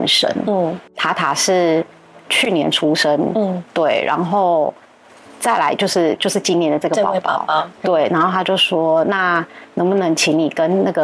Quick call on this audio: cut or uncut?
uncut